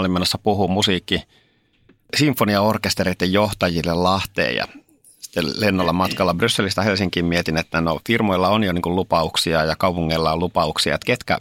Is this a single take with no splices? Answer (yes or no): yes